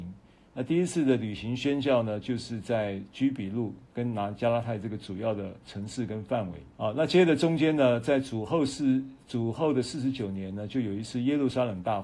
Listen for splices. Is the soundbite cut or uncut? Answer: cut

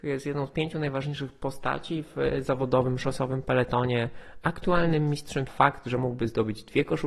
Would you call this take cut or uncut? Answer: cut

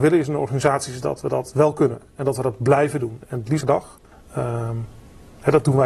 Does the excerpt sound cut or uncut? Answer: cut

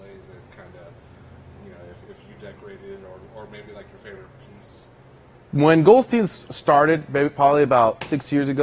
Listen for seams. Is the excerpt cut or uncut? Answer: uncut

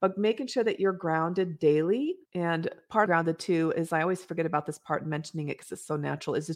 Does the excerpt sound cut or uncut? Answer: cut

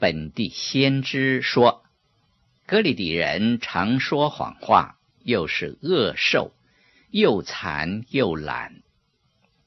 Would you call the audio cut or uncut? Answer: uncut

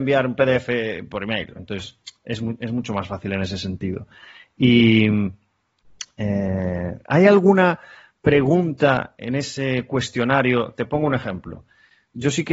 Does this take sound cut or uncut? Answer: cut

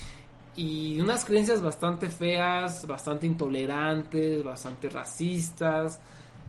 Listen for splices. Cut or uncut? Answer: uncut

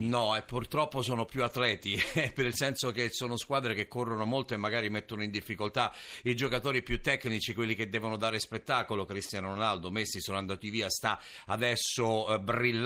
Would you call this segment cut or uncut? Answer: uncut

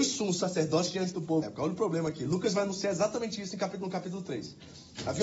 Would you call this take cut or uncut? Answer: cut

